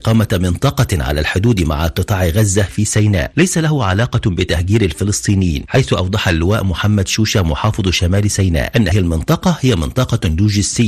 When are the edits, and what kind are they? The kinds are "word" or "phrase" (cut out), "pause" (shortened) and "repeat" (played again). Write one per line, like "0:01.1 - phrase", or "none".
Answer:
0:08.9 - word